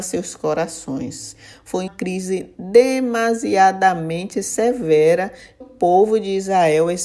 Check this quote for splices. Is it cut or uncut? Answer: cut